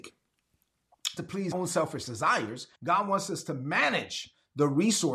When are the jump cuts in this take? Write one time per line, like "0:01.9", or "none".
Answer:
0:01.2
0:01.5
0:02.8